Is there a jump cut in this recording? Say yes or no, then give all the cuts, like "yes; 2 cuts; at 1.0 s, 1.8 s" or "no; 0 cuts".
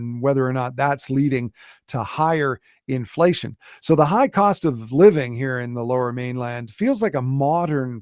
no; 0 cuts